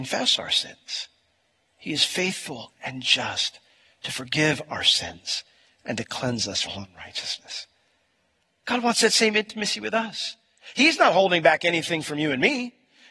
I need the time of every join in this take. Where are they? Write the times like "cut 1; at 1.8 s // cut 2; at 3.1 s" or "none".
cut 1; at 6.6 s